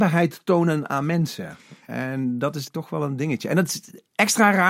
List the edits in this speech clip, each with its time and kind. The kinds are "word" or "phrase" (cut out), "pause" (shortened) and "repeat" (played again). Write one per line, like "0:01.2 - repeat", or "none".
0:02.7 - word